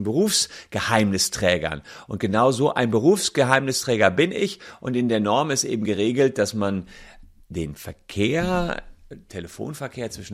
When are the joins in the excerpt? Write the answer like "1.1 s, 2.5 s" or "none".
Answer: 7.4 s